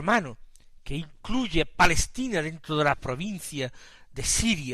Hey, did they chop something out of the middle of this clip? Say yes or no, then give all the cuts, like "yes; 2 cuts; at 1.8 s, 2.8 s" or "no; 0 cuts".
no; 0 cuts